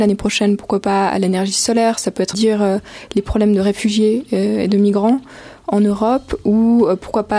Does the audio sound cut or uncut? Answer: cut